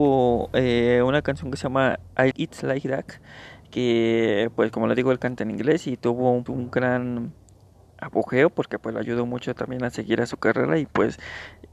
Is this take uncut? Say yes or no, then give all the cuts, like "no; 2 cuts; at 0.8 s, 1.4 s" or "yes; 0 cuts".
no; 2 cuts; at 2.3 s, 6.5 s